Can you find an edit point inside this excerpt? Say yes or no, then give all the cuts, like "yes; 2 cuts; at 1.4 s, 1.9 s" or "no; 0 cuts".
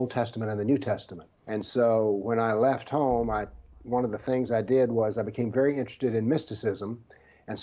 yes; 1 cut; at 1.4 s